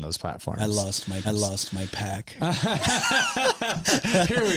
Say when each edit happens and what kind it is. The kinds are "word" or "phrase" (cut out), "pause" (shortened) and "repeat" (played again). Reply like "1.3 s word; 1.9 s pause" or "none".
1.2 s repeat